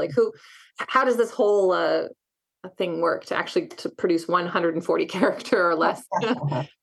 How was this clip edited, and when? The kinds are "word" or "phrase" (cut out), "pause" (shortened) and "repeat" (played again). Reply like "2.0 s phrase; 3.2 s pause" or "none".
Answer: none